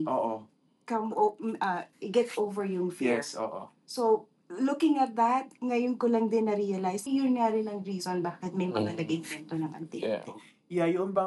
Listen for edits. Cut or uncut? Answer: cut